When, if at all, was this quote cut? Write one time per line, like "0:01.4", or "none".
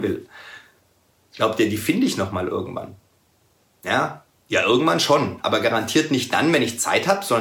none